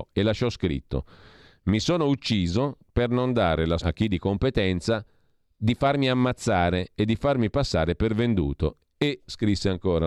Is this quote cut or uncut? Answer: cut